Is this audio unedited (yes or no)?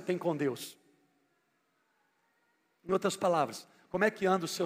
yes